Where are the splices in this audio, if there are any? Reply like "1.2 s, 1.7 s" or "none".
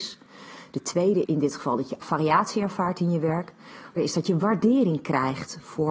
1.3 s, 2.0 s, 4.0 s